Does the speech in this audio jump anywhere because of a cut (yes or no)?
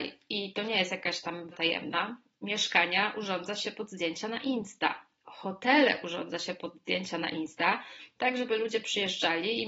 yes